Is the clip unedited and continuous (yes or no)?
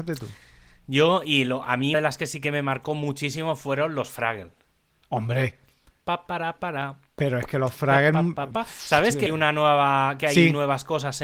no